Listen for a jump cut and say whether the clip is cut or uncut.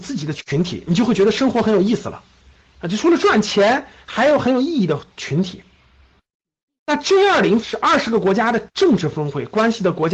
cut